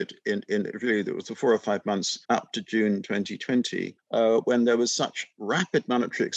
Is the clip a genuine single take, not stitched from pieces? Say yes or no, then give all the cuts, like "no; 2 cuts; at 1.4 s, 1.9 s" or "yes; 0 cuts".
no; 2 cuts; at 2.2 s, 4.0 s